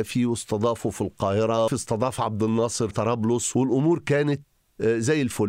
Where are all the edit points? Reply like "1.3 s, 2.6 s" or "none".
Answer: 1.7 s, 2.9 s